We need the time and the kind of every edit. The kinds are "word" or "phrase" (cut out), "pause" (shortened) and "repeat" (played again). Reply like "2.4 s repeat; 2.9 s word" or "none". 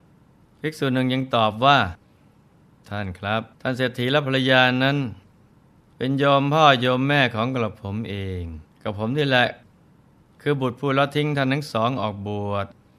3.5 s pause; 8.7 s pause